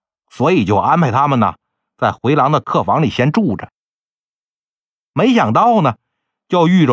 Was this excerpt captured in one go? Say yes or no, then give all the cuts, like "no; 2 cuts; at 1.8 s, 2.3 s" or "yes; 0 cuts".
yes; 0 cuts